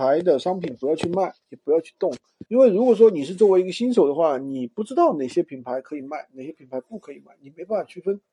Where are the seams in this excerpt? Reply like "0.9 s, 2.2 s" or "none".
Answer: 2.5 s